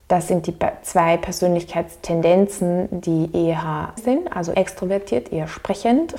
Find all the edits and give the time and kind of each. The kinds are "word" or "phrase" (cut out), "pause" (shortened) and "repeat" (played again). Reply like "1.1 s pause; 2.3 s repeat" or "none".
4.0 s word; 4.5 s word